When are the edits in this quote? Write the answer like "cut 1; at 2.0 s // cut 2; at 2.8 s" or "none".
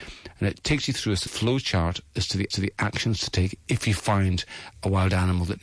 cut 1; at 1.3 s // cut 2; at 2.5 s